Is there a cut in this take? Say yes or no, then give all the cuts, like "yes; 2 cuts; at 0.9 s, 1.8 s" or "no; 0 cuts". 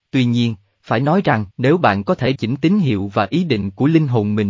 yes; 2 cuts; at 1.5 s, 2.3 s